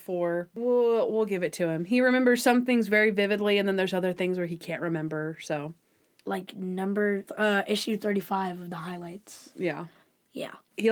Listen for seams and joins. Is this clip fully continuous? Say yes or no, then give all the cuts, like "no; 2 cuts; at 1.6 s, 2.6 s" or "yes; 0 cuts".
yes; 0 cuts